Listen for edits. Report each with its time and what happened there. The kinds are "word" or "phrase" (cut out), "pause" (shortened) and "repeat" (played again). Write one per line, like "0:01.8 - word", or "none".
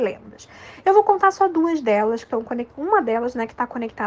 none